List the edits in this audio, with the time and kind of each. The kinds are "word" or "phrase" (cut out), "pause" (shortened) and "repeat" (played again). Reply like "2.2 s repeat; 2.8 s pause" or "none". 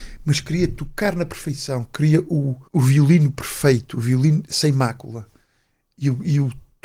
2.7 s pause